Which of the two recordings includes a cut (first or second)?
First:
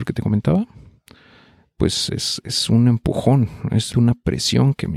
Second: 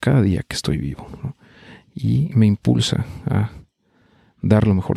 first